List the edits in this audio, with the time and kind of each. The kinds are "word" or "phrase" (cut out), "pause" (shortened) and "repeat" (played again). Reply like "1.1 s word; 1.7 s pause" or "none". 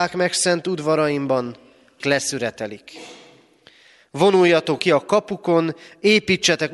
2.0 s word; 4.8 s word